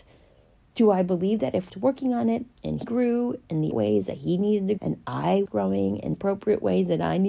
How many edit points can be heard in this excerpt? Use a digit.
6